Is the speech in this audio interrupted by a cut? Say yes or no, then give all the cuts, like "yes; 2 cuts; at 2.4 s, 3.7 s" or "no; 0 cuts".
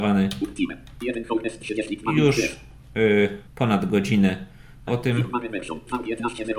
yes; 2 cuts; at 3.5 s, 4.9 s